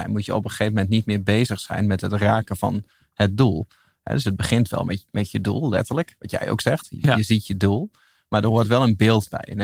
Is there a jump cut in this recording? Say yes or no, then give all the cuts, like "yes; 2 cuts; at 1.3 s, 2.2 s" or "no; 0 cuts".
no; 0 cuts